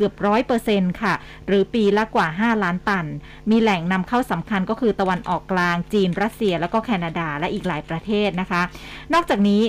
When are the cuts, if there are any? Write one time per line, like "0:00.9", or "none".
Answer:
none